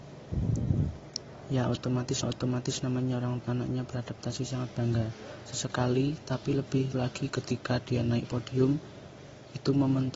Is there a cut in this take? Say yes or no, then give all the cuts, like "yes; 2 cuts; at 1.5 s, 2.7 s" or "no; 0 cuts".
yes; 3 cuts; at 2.2 s, 3.4 s, 6.9 s